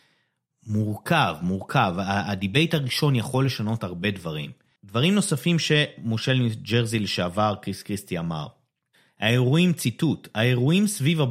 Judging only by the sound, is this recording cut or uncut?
uncut